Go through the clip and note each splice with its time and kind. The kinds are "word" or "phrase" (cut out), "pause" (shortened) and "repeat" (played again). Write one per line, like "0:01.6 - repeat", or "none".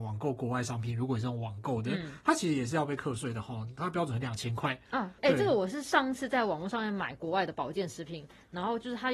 0:05.2 - word